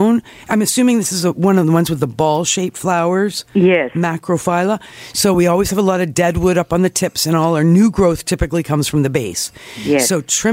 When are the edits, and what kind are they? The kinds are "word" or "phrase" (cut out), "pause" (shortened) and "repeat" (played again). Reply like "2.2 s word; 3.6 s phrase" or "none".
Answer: none